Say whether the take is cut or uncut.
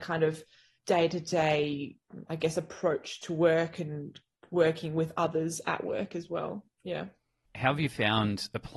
uncut